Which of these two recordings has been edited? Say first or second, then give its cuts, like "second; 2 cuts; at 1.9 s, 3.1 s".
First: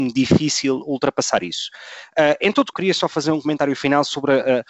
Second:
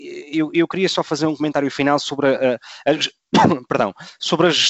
first; 1 cut; at 2.7 s